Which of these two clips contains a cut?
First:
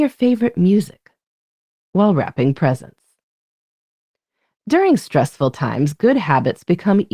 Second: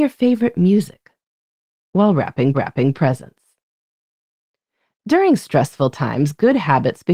second; 1 cut; at 2.5 s

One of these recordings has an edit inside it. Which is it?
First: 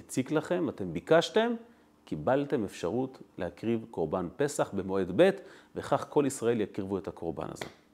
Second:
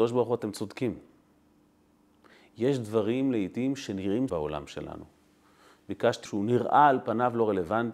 second; 2 cuts; at 4.3 s, 6.2 s

